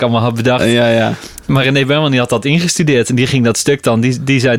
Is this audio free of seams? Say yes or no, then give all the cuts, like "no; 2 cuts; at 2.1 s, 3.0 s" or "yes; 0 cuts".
yes; 0 cuts